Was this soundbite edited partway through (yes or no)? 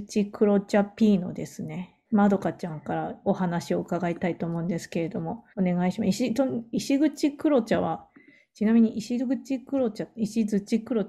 yes